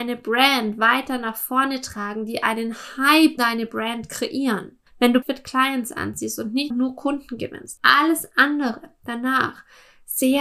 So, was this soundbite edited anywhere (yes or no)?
yes